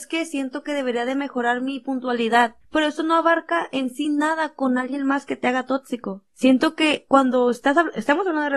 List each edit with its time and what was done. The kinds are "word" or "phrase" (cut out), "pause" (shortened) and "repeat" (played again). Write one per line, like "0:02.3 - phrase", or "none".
none